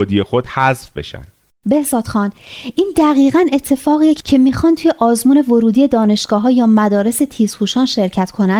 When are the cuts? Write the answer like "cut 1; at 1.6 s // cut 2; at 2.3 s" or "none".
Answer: cut 1; at 4.2 s